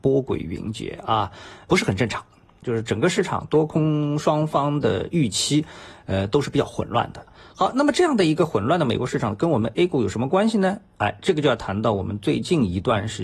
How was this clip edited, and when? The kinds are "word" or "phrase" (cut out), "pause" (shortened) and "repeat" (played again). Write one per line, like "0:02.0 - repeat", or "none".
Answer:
none